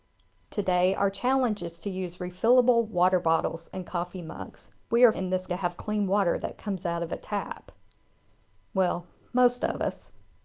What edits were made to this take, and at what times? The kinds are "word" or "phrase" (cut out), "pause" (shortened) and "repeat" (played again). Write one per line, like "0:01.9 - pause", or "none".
0:04.8 - pause
0:05.1 - word
0:05.5 - word